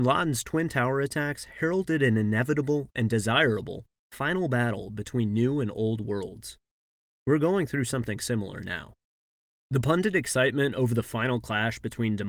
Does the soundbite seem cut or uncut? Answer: uncut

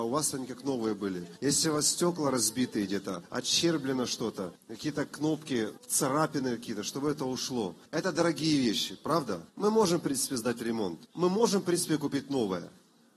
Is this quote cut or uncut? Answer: cut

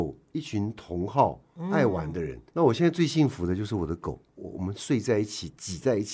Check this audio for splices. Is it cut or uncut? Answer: cut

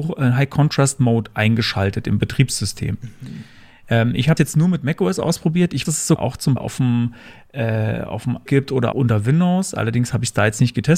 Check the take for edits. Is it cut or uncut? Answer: cut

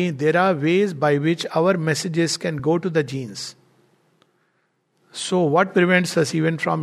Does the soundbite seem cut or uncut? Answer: uncut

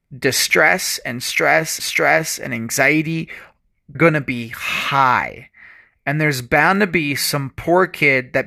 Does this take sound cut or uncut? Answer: cut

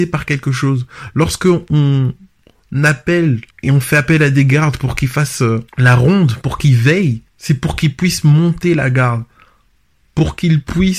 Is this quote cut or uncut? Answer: cut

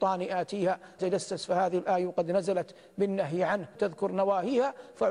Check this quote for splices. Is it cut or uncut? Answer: cut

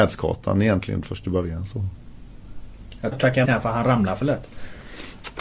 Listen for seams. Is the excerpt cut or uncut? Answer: cut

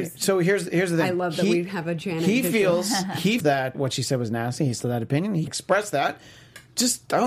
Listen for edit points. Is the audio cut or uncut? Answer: cut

